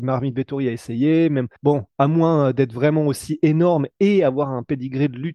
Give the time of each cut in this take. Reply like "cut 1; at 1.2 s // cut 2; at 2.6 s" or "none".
cut 1; at 1.6 s